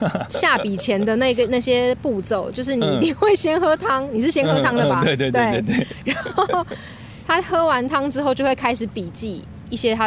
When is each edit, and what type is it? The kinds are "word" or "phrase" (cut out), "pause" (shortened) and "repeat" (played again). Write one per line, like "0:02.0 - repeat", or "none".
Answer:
none